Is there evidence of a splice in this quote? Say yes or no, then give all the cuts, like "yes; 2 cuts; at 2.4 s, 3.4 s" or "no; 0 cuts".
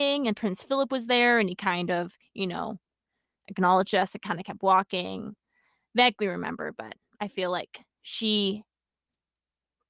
no; 0 cuts